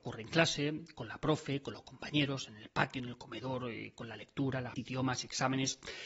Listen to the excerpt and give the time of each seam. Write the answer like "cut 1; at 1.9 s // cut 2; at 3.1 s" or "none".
cut 1; at 4.8 s